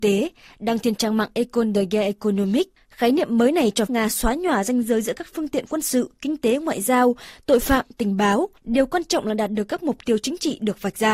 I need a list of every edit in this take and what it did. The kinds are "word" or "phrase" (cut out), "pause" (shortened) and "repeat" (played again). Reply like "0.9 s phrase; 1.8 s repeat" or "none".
3.9 s word; 8.6 s pause